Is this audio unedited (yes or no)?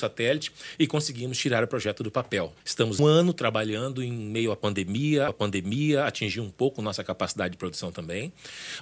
no